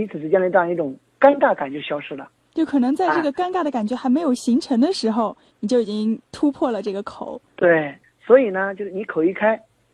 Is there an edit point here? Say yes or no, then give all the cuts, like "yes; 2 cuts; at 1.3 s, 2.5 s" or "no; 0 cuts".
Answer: no; 0 cuts